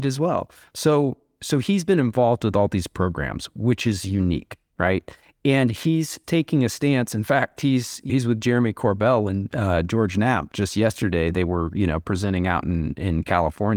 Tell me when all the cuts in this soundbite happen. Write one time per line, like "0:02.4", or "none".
0:06.2
0:08.1

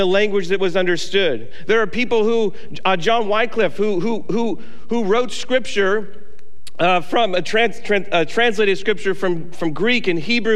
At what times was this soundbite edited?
none

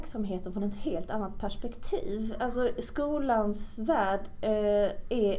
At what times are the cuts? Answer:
none

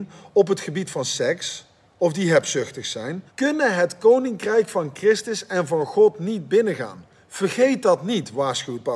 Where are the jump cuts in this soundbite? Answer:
0:03.3

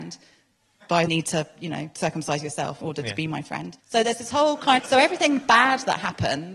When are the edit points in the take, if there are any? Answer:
0:01.1
0:02.8
0:03.8
0:04.8

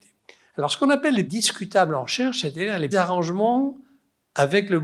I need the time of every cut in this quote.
0:01.3
0:02.9

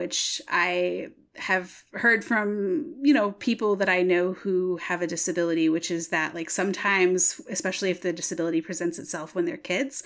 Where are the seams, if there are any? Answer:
none

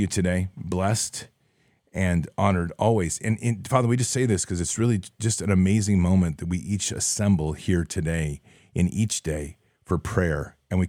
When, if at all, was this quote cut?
none

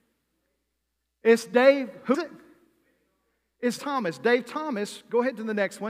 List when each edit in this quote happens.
0:02.1
0:03.8

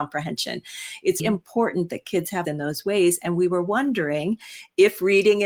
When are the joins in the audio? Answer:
0:01.2
0:02.4

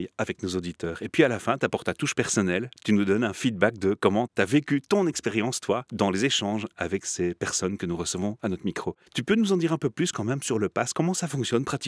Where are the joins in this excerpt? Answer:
0:05.9
0:09.0

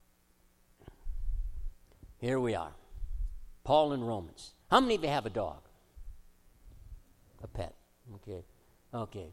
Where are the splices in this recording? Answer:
0:03.6
0:04.6

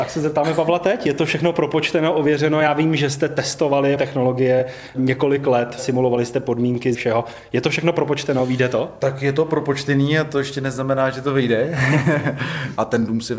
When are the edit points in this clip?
0:04.0
0:06.9

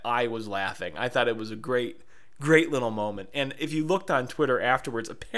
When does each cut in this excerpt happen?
none

